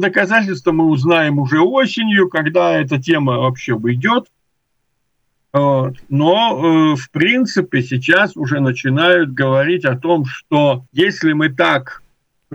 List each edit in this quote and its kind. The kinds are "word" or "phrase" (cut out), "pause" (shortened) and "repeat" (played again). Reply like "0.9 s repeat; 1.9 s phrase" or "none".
10.9 s pause